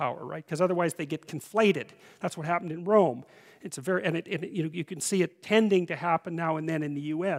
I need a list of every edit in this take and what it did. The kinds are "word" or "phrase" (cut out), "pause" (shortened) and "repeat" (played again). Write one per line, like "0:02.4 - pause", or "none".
none